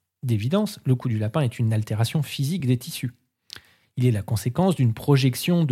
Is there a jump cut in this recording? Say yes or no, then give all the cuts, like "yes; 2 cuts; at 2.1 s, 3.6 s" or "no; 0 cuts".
no; 0 cuts